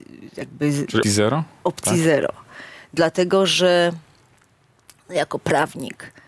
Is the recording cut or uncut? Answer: cut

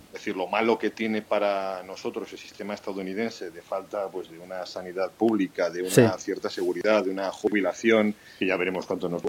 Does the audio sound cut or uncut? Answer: uncut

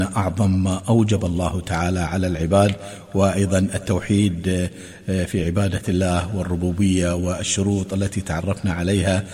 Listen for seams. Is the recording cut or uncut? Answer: uncut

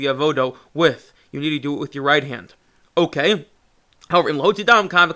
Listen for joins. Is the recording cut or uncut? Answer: uncut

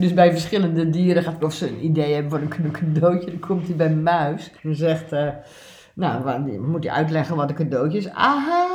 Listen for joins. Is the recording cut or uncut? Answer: cut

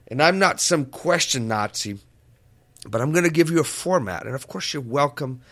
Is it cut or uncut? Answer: uncut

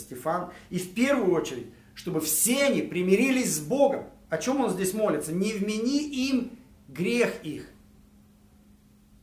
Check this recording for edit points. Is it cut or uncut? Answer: uncut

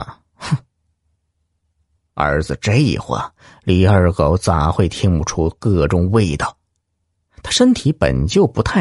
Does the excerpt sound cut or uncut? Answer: uncut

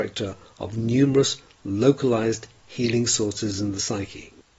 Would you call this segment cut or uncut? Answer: uncut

